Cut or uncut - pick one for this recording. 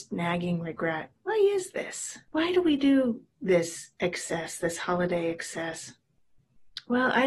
cut